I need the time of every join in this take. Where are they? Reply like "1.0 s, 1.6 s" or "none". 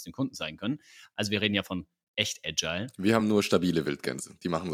none